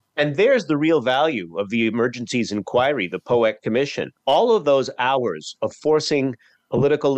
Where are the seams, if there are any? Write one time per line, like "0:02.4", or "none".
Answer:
0:04.2